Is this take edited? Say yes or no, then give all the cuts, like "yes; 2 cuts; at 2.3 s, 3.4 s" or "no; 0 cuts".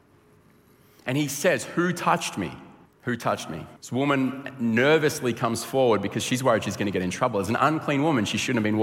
yes; 2 cuts; at 2.9 s, 3.8 s